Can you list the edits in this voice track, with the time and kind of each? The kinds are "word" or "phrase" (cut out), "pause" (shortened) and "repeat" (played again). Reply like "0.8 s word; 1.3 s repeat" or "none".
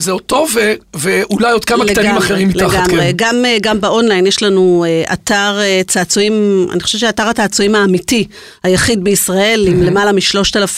none